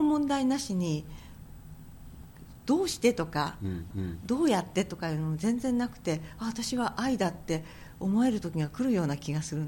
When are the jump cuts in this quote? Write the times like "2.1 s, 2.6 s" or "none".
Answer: 3.9 s